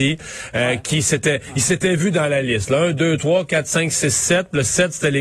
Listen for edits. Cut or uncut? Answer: uncut